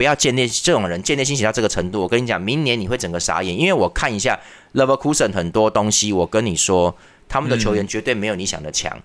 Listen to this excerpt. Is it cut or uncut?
uncut